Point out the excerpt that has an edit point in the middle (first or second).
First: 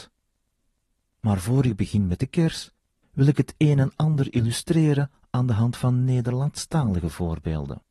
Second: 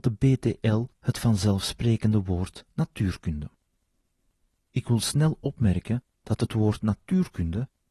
second